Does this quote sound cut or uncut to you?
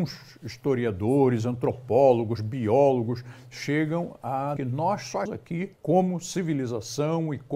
cut